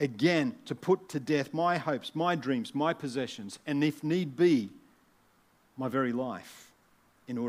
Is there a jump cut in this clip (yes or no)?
no